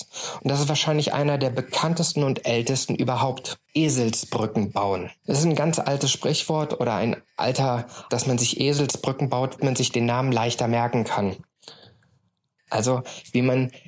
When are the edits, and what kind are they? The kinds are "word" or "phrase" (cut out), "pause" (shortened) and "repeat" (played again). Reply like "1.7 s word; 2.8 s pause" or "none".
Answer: 3.7 s pause; 5.2 s pause; 8.1 s word; 9.6 s word